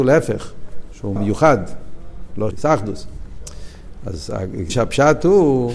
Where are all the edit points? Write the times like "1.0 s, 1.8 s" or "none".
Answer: 1.2 s, 2.5 s, 4.7 s